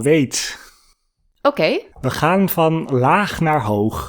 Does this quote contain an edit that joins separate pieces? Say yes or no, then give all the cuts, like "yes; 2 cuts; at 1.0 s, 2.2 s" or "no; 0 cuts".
yes; 1 cut; at 1.9 s